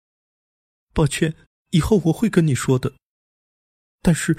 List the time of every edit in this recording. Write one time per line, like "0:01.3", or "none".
0:01.5